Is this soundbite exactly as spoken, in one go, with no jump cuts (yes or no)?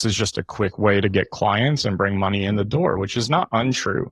yes